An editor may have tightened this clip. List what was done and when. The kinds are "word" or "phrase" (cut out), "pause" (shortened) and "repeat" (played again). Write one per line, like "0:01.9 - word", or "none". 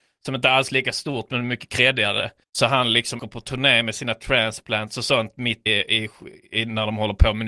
0:02.4 - pause
0:03.2 - word
0:05.7 - word